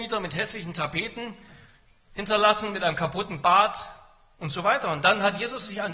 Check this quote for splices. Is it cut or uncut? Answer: uncut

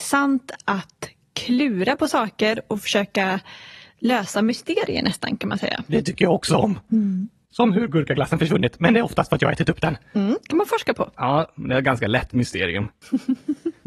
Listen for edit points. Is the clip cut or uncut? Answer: uncut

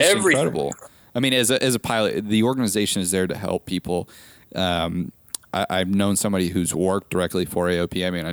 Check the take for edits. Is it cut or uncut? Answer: uncut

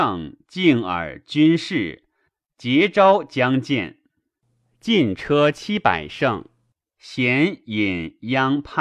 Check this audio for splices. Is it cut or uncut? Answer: uncut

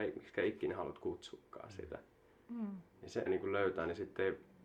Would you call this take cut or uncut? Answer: cut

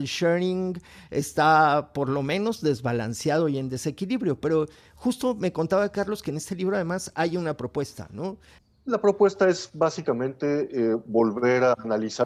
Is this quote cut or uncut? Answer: uncut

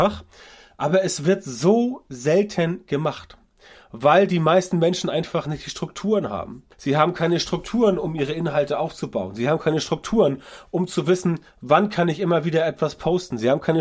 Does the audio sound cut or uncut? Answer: cut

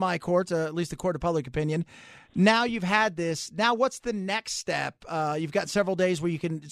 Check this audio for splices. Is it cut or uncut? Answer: uncut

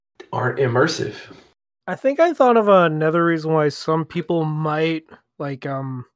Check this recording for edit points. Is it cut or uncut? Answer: uncut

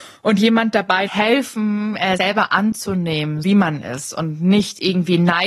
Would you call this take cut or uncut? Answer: cut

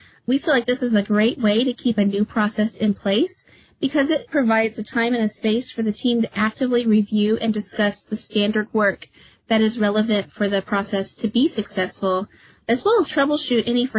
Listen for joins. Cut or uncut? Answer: uncut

